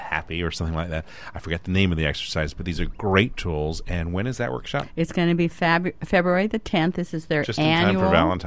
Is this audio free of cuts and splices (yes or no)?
yes